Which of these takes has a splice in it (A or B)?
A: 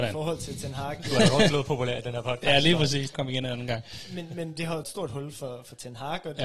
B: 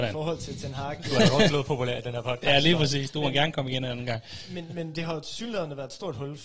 A